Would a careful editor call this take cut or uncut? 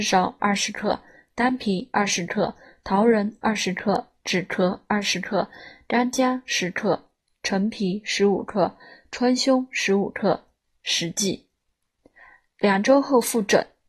uncut